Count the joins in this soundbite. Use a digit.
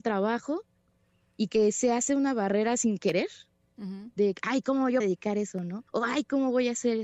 3